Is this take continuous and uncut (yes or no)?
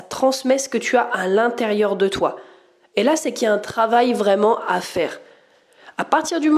yes